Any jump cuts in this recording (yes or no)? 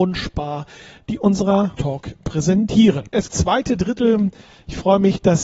yes